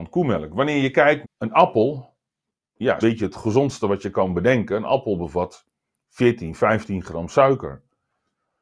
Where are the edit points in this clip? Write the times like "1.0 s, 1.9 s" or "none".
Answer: 1.2 s, 3.0 s

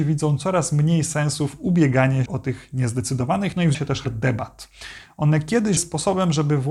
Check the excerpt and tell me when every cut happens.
2.3 s, 3.7 s, 4.0 s, 5.8 s

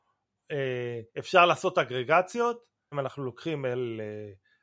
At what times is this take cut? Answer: 1.1 s, 2.9 s

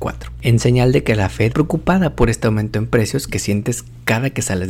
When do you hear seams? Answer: 1.5 s

